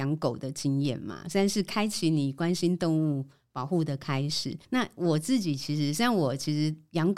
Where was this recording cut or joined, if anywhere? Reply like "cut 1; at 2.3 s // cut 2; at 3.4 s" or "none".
cut 1; at 4.6 s